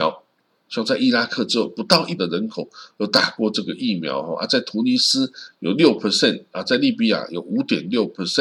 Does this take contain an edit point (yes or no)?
yes